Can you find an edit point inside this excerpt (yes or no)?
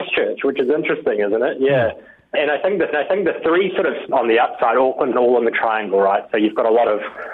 yes